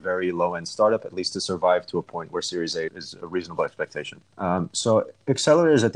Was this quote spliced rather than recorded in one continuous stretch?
yes; 2 cuts; at 2.9 s, 4.3 s

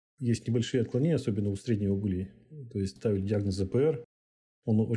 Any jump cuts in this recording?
yes; 1 cut; at 3.0 s

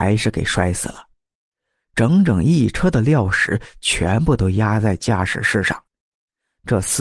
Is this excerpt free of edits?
yes; 0 cuts

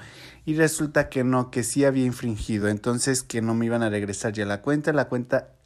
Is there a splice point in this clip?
no; 0 cuts

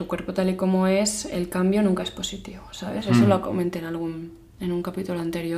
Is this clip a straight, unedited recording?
yes; 0 cuts

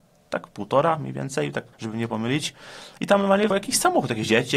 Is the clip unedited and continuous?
no; 2 cuts; at 1.7 s, 3.5 s

